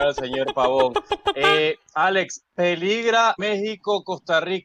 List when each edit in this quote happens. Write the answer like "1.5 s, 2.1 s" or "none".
3.4 s